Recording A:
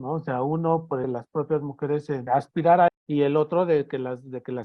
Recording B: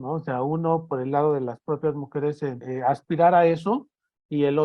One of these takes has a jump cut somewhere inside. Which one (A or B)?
A